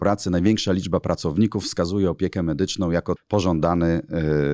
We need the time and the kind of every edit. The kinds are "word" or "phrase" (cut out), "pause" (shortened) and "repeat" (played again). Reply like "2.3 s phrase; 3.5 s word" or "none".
3.2 s word